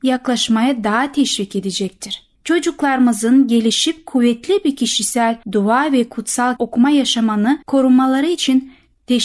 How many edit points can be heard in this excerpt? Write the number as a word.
four